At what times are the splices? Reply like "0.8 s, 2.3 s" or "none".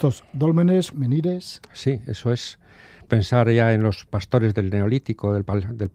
0.9 s, 3.1 s, 4.1 s